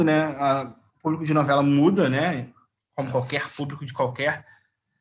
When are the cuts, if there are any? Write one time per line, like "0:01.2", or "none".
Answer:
none